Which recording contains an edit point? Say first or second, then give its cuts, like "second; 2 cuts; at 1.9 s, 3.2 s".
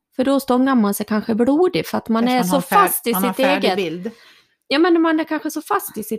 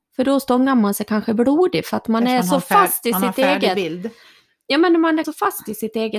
second; 1 cut; at 5.2 s